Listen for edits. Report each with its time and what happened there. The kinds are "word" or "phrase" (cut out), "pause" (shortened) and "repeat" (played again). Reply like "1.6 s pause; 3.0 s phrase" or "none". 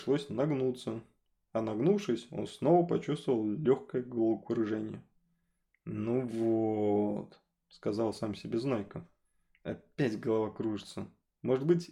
none